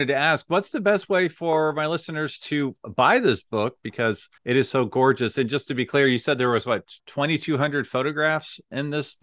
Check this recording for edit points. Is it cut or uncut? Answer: cut